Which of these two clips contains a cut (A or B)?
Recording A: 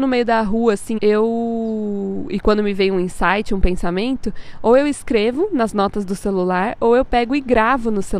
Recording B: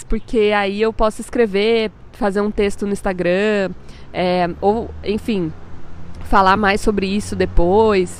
A